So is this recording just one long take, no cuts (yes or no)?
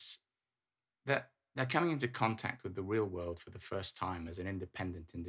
yes